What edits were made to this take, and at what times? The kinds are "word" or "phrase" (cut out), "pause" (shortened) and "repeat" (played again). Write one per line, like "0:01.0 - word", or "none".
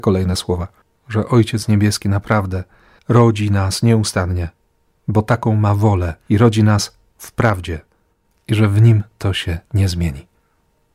0:06.2 - pause